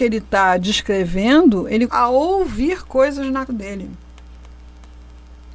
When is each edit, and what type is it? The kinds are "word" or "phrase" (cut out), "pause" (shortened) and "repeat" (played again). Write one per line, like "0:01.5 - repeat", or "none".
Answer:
0:01.9 - word
0:03.5 - word